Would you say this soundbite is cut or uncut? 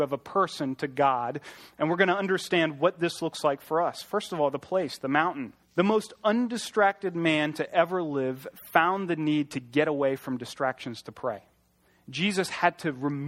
cut